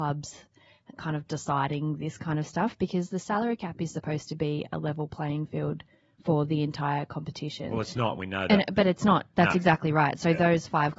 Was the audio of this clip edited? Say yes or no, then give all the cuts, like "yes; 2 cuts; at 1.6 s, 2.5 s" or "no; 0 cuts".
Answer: no; 0 cuts